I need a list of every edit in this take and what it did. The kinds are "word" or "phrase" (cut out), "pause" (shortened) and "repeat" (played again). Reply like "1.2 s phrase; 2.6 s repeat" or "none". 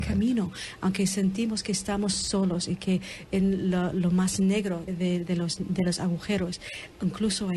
4.9 s word

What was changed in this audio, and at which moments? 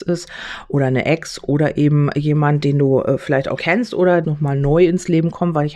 3.6 s word; 4.2 s phrase

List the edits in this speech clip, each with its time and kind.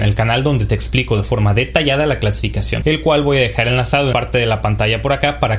2.8 s word; 4.1 s word

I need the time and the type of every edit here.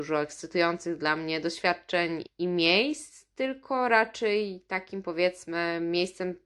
2.2 s word

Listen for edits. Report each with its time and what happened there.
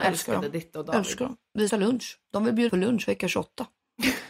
1.7 s word; 2.7 s word

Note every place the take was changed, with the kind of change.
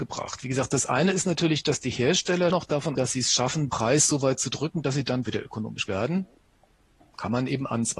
2.5 s word; 2.9 s word; 3.7 s word; 5.2 s word; 5.9 s word

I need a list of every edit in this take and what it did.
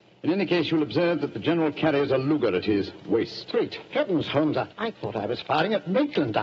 4.7 s pause

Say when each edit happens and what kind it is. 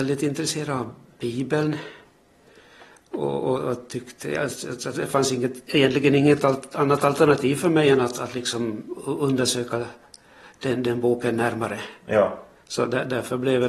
5.7 s word

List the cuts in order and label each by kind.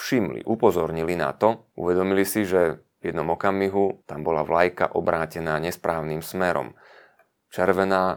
1.7 s pause; 2.9 s pause; 4.0 s pause

